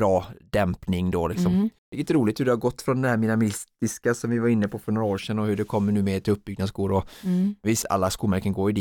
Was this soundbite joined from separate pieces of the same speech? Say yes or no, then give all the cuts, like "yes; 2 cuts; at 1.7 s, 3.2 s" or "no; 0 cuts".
yes; 2 cuts; at 1.8 s, 7.8 s